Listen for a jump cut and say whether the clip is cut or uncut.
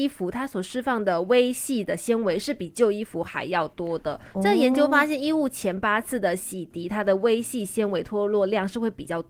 uncut